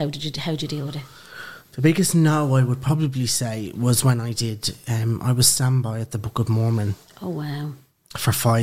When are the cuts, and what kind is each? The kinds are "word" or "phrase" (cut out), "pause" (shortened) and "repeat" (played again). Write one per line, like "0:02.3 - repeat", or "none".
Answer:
none